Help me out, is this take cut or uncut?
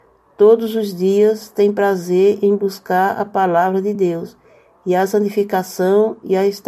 uncut